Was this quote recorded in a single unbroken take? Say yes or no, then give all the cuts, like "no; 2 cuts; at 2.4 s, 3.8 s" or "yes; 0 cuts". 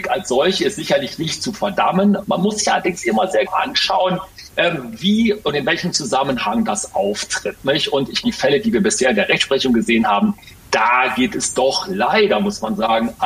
no; 2 cuts; at 3.5 s, 8.2 s